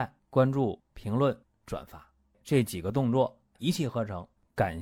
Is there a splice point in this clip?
no; 0 cuts

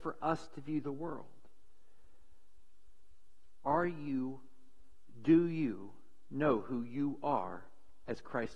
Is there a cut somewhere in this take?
no; 0 cuts

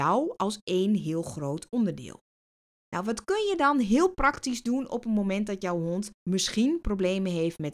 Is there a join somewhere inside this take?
yes; 2 cuts; at 2.6 s, 6.2 s

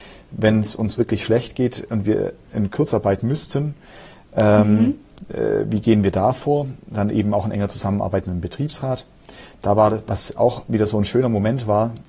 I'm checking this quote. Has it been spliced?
no; 0 cuts

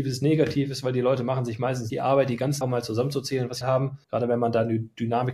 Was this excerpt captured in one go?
no; 4 cuts; at 1.9 s, 2.6 s, 3.6 s, 4.0 s

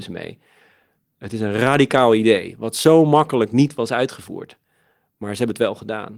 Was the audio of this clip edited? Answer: no; 0 cuts

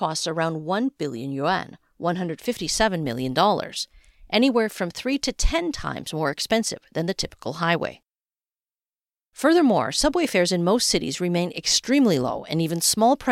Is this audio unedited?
yes; 0 cuts

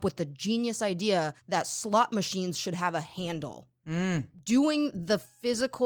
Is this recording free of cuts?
no; 1 cut; at 1.4 s

